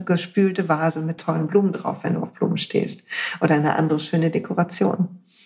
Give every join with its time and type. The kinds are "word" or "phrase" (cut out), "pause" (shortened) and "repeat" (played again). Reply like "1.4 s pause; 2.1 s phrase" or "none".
1.2 s word